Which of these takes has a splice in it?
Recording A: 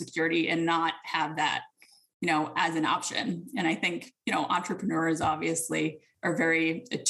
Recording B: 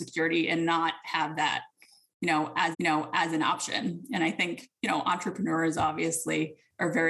B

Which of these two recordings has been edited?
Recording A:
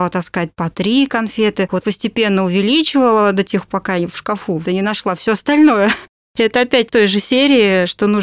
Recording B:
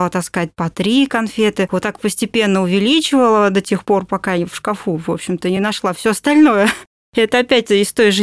A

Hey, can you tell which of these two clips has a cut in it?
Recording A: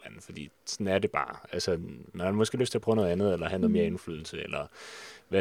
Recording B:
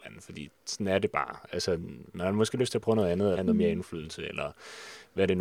B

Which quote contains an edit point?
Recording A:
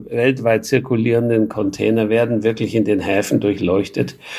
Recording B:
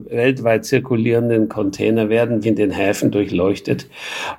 B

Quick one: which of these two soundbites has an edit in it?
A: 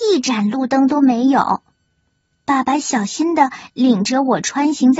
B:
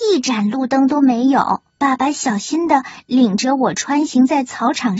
B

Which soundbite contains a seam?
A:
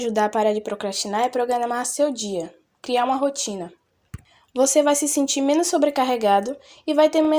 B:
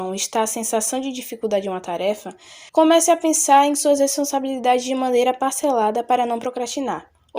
B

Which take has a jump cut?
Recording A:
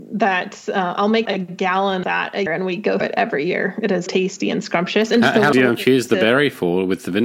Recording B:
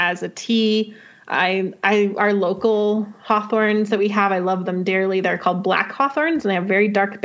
A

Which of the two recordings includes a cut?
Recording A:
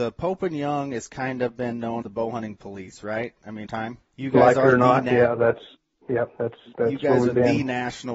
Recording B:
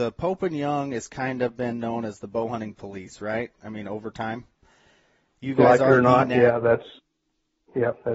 A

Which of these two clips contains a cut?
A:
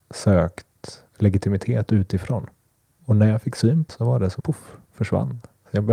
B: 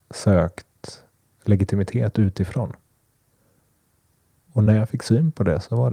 A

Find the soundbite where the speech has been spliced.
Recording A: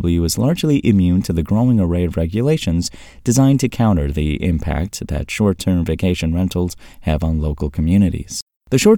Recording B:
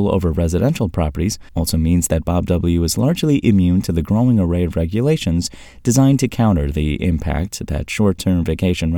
B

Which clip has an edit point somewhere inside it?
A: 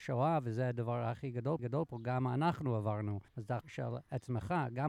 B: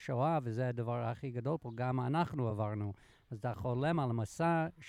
A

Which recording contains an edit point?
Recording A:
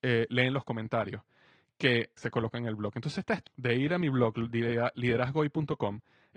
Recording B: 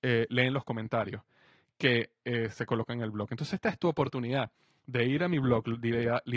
A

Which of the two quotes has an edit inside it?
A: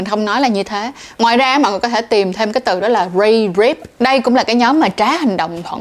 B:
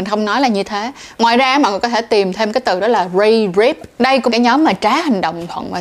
B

